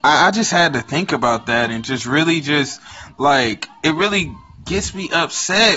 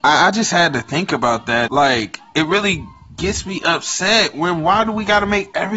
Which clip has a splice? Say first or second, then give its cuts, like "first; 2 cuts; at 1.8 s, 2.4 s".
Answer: second; 1 cut; at 1.7 s